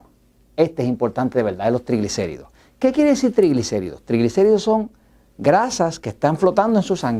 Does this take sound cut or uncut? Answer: uncut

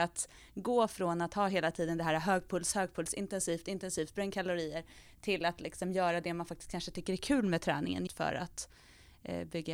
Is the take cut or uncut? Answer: cut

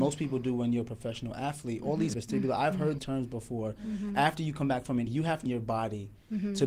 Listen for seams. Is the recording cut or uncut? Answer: cut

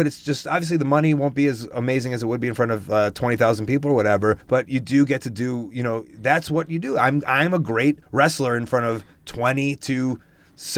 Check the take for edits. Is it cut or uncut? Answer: cut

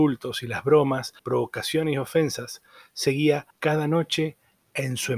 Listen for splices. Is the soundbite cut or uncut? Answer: cut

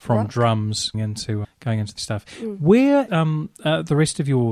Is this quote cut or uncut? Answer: cut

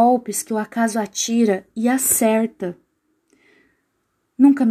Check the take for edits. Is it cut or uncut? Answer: uncut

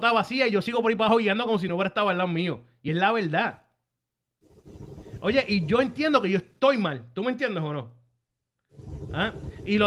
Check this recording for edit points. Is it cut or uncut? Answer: uncut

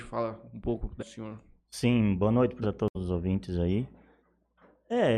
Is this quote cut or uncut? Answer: cut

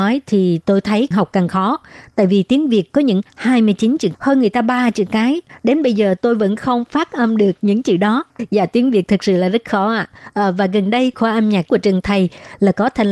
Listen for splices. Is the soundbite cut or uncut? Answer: cut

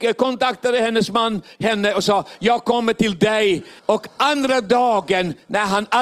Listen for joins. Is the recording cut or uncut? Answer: cut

